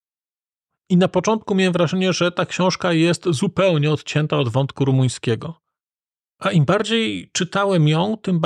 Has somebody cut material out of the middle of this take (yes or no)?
no